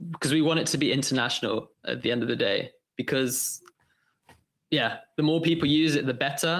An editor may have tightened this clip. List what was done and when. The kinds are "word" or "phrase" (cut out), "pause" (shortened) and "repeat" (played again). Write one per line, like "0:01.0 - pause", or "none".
none